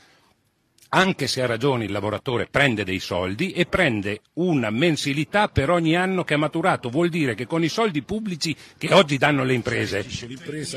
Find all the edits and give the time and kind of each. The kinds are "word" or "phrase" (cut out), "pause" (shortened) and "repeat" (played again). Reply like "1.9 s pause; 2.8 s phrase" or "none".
none